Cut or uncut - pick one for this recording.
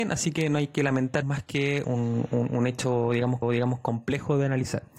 cut